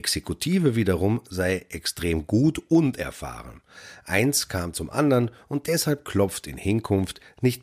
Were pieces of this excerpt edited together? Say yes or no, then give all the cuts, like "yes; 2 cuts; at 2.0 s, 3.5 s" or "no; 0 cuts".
no; 0 cuts